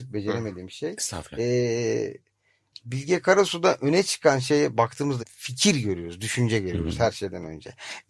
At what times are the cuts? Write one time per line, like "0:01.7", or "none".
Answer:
0:05.2